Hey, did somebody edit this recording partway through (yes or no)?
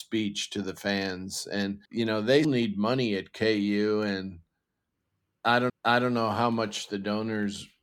yes